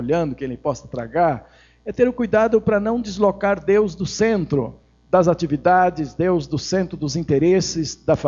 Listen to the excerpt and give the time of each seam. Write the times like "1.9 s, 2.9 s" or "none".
none